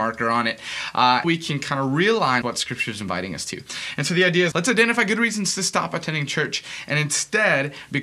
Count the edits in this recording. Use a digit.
3